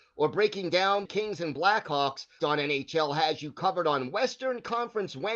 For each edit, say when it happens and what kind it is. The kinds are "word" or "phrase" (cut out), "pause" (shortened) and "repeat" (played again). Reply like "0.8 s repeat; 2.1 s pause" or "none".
1.0 s phrase; 2.4 s word